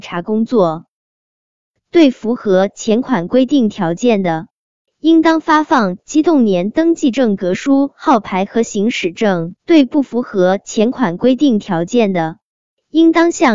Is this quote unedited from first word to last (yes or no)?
no